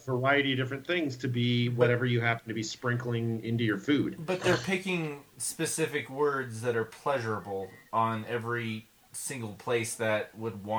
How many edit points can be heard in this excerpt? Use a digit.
0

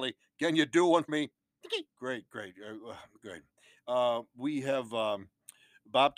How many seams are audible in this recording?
2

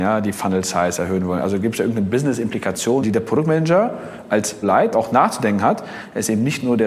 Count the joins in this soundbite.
3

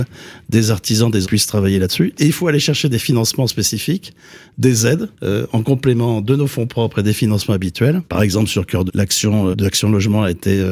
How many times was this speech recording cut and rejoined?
5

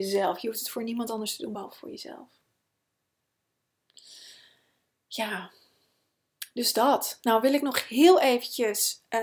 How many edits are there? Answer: 0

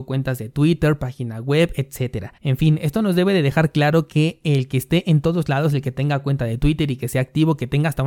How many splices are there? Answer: 1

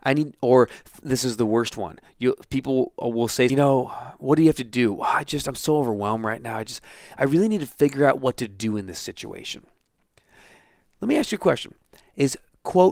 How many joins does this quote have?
1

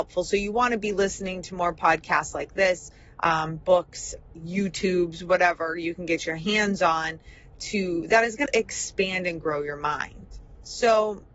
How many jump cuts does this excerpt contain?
1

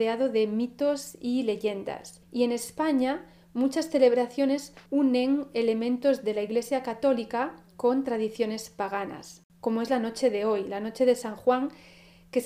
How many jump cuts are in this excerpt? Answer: 2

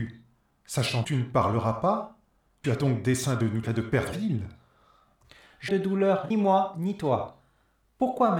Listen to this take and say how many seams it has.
6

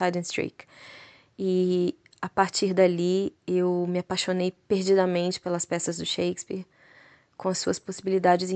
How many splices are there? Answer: 0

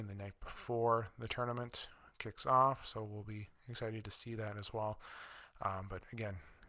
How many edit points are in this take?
0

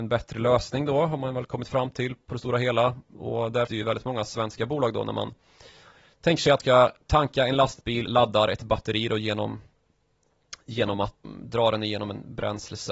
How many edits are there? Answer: 4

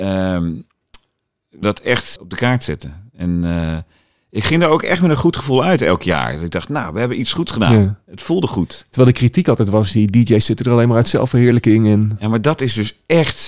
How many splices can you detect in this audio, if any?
2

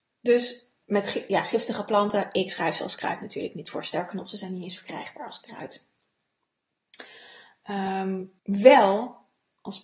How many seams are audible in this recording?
1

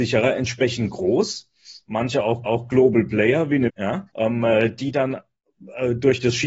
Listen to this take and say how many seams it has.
3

